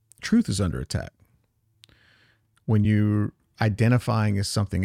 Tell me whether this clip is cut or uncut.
uncut